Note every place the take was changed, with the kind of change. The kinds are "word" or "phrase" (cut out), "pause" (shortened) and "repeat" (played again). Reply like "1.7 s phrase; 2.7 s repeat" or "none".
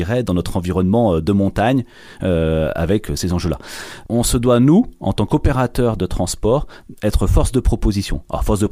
none